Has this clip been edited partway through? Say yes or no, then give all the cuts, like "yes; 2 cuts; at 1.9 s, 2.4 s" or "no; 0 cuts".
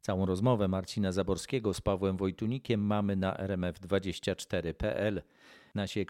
no; 0 cuts